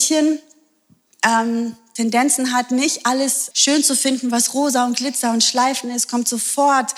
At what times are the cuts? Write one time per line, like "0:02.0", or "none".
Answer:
0:03.5